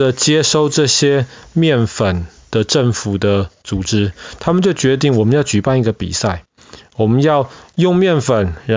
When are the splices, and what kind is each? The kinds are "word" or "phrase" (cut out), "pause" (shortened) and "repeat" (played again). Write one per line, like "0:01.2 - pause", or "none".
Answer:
none